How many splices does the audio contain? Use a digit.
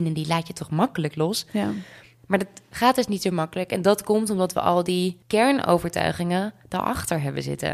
0